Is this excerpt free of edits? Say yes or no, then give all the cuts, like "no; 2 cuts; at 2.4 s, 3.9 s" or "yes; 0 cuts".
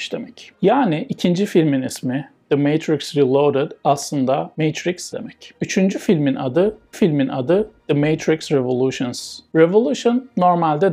no; 2 cuts; at 5.1 s, 6.9 s